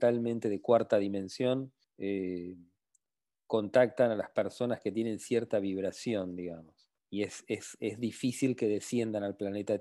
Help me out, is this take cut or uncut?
cut